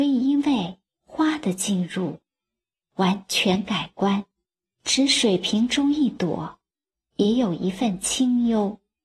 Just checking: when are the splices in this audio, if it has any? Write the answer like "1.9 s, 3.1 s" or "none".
4.7 s